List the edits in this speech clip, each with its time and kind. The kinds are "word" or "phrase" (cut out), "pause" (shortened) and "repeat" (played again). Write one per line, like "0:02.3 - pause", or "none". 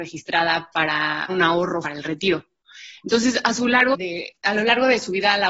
0:01.3 - word
0:01.8 - word
0:03.9 - word